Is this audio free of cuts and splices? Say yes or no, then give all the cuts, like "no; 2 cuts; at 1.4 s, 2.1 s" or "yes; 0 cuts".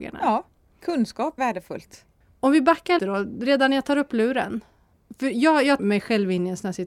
no; 3 cuts; at 1.4 s, 3.0 s, 5.8 s